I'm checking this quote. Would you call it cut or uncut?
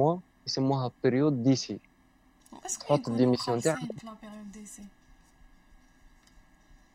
uncut